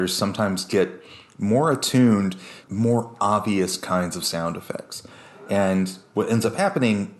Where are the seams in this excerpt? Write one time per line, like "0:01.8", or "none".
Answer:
0:02.6